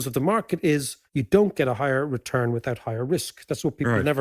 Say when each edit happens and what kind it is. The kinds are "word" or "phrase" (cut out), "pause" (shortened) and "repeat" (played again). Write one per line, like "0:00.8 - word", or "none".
0:01.1 - pause